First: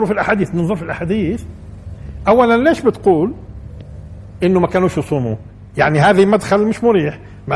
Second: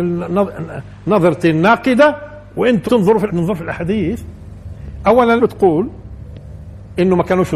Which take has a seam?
second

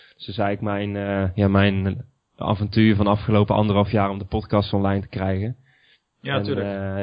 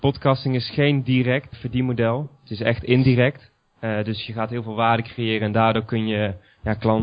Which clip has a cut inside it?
second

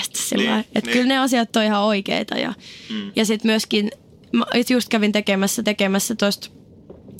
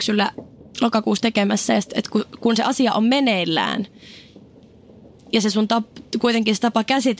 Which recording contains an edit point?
first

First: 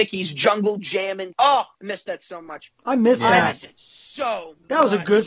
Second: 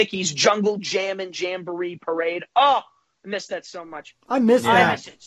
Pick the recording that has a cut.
first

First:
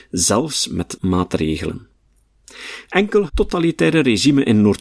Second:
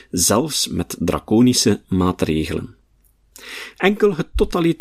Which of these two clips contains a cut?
first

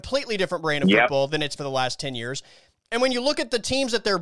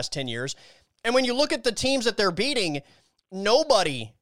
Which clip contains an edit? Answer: first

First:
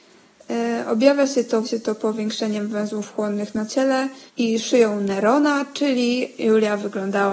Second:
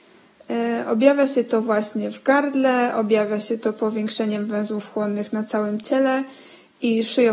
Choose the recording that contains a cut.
first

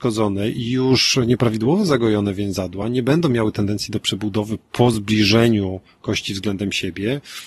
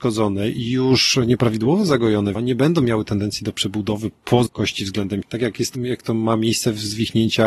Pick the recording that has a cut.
second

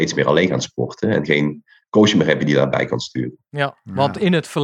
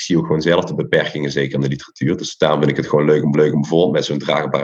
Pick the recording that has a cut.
second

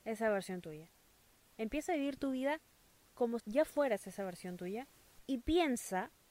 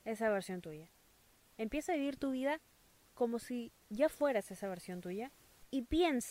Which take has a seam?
first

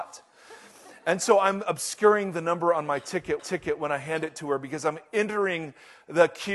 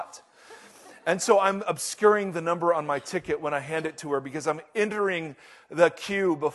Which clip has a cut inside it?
first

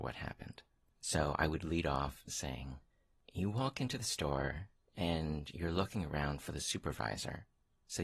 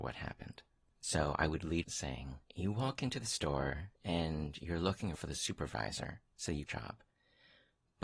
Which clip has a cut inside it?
second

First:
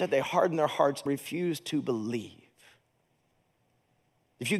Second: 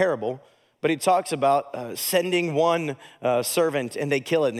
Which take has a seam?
first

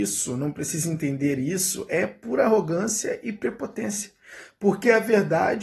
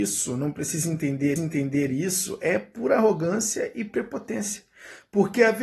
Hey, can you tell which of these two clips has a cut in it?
second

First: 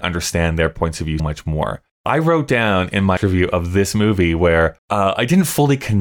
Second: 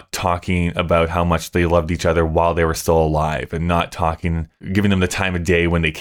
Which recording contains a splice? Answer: first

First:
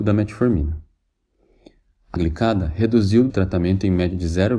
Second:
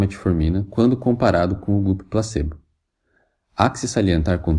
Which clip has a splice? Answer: first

